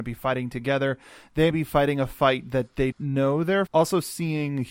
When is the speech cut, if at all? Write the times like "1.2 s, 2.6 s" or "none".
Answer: 1.5 s, 2.9 s, 3.7 s